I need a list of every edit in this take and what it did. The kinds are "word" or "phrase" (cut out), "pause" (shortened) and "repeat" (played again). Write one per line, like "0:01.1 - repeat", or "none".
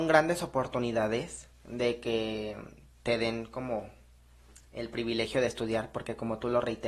none